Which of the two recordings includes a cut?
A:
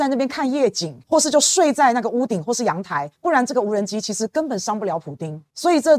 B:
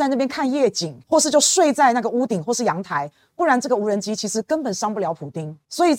A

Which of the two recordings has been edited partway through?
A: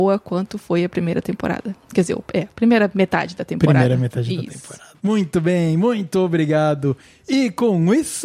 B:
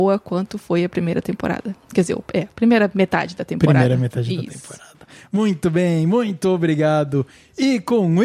A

